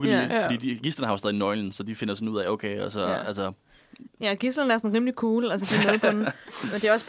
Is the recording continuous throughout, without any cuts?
yes; 0 cuts

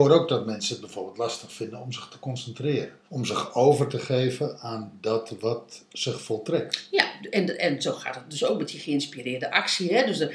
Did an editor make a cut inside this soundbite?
yes; 1 cut; at 3.1 s

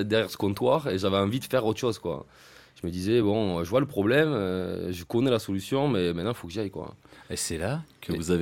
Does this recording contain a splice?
no; 0 cuts

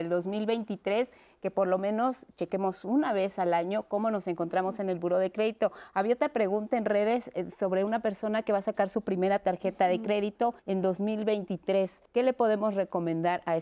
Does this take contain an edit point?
yes; 2 cuts; at 10.6 s, 12.1 s

